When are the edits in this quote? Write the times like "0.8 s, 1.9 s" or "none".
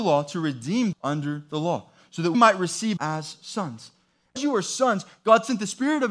0.9 s, 2.3 s, 3.0 s, 4.4 s